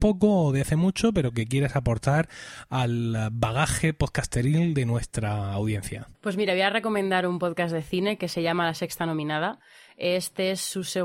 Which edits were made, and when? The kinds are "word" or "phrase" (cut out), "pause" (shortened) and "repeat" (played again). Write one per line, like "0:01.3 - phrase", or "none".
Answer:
0:06.1 - pause